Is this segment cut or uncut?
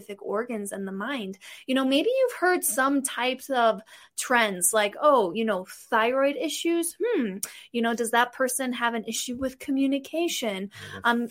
uncut